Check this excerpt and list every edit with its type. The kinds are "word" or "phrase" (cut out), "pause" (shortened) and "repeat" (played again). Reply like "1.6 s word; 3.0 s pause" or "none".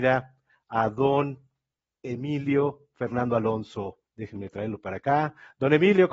4.1 s pause